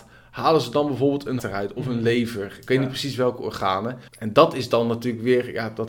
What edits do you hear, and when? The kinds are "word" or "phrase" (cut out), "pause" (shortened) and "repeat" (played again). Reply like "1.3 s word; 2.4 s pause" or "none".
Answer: 1.4 s word; 4.1 s pause